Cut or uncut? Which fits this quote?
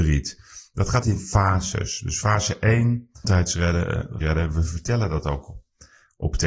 cut